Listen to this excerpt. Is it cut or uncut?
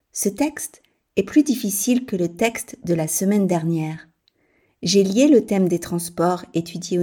uncut